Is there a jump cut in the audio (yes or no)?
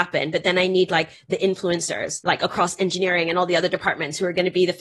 no